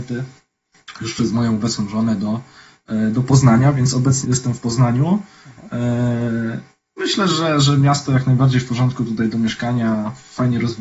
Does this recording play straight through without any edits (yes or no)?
no